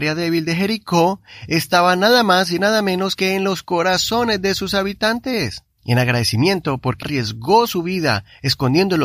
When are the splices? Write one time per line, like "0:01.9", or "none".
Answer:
0:05.7
0:07.0